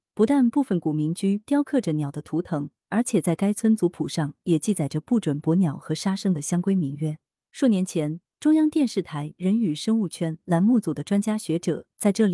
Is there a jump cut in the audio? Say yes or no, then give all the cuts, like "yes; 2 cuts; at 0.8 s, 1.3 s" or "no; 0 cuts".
no; 0 cuts